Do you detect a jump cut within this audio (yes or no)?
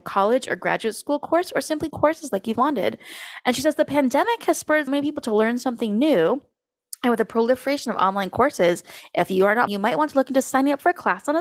yes